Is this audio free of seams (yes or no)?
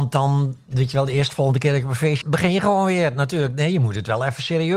no